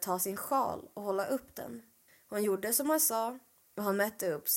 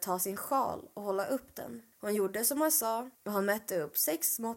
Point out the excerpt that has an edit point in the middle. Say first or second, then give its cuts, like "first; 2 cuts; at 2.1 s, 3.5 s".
second; 2 cuts; at 1.9 s, 3.2 s